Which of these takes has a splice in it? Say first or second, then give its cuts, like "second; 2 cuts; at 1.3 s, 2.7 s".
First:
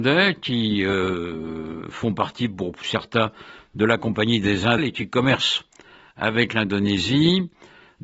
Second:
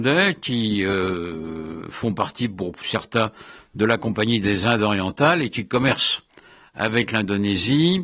first; 1 cut; at 4.8 s